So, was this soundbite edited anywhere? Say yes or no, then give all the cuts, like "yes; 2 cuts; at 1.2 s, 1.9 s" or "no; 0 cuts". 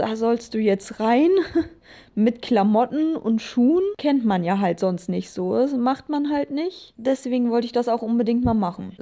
no; 0 cuts